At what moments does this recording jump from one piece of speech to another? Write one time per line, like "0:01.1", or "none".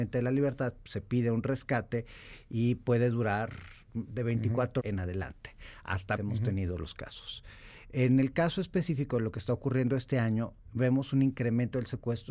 0:04.8
0:06.2